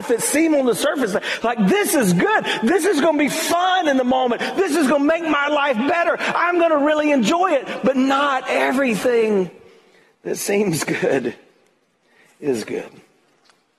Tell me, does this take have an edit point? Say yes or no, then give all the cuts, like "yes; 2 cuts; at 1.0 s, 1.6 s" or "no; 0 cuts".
no; 0 cuts